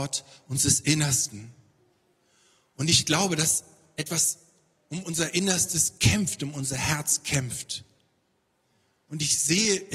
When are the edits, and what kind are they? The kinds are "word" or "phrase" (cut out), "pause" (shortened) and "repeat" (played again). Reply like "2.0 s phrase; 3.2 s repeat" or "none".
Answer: none